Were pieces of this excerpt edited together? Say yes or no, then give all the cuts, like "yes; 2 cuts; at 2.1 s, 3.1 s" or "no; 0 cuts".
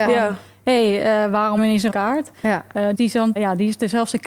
yes; 4 cuts; at 1.6 s, 1.9 s, 2.9 s, 3.4 s